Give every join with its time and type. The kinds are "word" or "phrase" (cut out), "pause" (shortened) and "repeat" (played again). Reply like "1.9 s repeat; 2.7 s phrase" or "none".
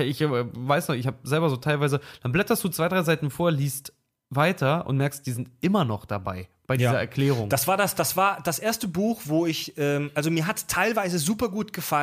none